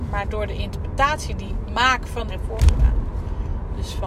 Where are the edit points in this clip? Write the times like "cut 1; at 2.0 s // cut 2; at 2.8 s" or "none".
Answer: cut 1; at 1.7 s // cut 2; at 2.3 s